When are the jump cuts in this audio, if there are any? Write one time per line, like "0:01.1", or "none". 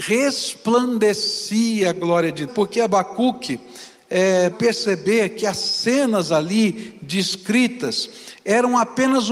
0:02.5
0:04.5